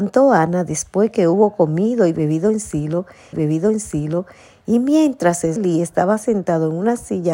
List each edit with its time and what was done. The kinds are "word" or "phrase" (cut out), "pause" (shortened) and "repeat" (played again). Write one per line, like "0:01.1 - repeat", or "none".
0:03.3 - repeat
0:05.6 - word